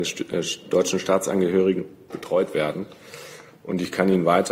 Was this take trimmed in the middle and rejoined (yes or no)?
yes